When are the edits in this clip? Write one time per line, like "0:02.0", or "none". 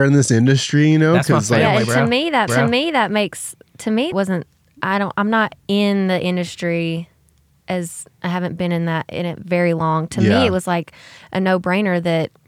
0:02.5
0:04.1